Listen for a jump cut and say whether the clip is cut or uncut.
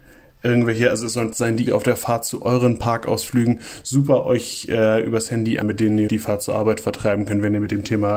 cut